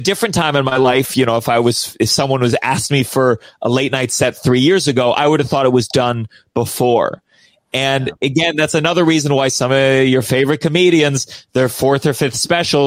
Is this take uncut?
yes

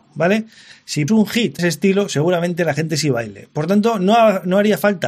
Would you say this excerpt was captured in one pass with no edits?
no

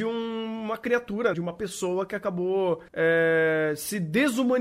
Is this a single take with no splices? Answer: no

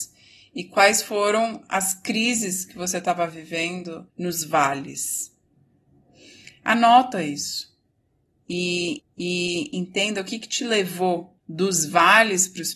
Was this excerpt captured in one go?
no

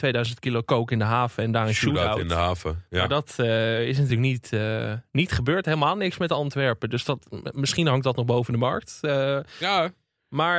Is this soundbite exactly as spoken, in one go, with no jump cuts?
yes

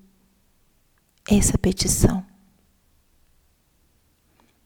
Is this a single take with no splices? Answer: yes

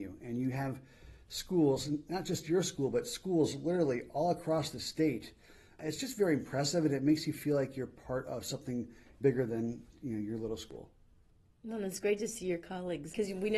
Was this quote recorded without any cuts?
yes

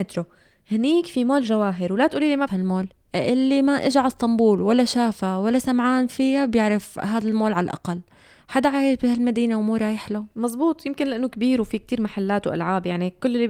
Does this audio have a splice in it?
yes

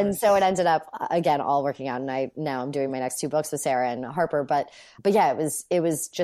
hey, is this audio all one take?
yes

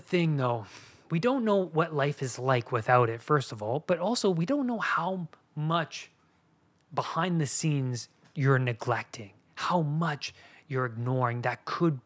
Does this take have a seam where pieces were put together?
no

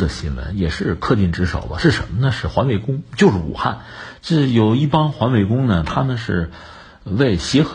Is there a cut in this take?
no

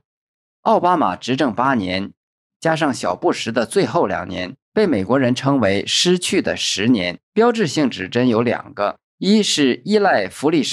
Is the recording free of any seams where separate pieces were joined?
no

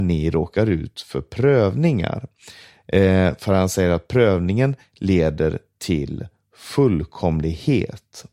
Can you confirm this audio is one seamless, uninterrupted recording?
yes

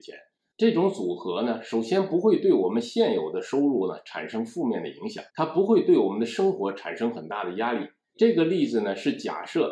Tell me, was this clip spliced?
yes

